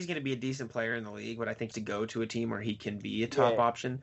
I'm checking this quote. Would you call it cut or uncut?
cut